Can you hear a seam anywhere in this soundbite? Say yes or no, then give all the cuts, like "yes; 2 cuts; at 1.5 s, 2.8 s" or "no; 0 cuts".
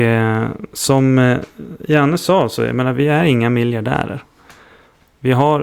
no; 0 cuts